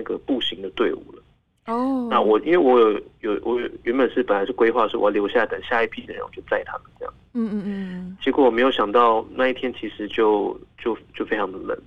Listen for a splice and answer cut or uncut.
uncut